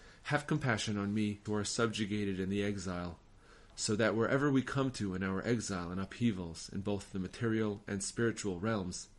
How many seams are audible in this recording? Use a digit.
1